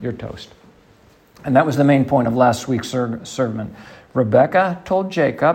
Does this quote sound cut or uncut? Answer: uncut